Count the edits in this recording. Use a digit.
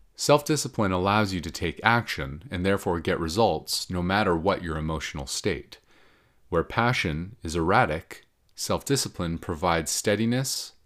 0